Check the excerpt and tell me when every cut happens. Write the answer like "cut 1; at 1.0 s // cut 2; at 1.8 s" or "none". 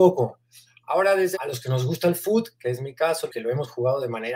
cut 1; at 1.3 s // cut 2; at 3.3 s